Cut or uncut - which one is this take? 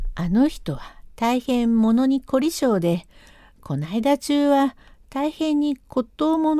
uncut